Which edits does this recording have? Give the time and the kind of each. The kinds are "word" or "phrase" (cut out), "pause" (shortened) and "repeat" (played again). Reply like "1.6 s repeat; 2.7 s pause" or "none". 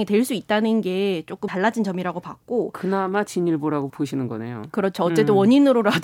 1.5 s word; 3.9 s word